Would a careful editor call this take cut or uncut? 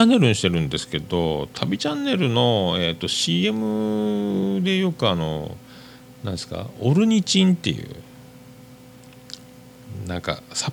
uncut